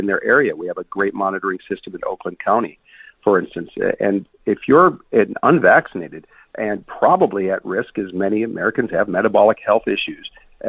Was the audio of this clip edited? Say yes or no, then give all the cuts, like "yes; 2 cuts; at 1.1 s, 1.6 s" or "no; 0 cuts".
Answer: no; 0 cuts